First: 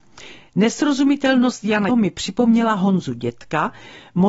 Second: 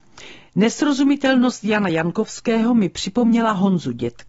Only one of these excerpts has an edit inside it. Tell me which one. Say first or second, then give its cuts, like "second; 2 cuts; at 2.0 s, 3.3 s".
first; 1 cut; at 1.9 s